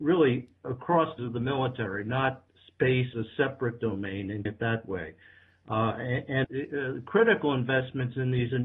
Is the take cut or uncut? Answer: cut